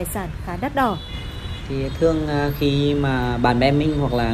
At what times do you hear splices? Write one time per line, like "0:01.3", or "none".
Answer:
none